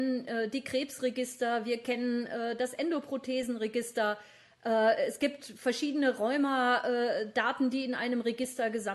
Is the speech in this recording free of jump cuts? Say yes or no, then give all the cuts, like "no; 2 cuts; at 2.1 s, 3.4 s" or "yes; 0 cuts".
yes; 0 cuts